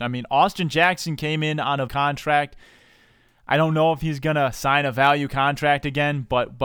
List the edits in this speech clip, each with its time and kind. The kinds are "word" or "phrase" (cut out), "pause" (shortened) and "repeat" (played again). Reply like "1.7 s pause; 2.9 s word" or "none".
1.9 s word